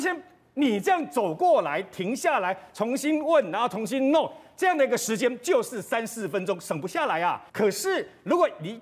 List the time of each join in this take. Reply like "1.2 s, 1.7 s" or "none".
7.5 s